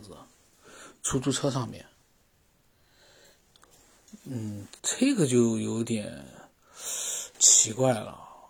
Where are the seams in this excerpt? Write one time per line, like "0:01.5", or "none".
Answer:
0:04.8
0:07.3